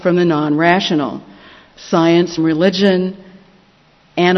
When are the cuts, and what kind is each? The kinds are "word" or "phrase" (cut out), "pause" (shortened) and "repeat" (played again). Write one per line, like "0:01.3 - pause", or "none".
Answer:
0:02.4 - word